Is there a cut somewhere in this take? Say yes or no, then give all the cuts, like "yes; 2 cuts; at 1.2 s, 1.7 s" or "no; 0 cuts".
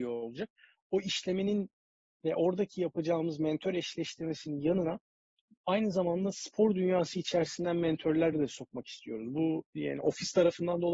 no; 0 cuts